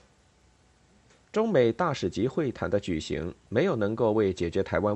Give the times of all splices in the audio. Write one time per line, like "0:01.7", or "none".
none